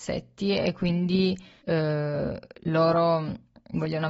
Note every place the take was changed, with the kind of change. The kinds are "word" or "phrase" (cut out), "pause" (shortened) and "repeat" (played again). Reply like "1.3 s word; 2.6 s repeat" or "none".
1.6 s pause

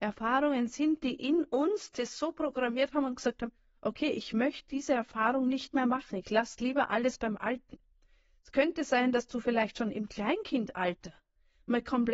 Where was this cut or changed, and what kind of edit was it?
none

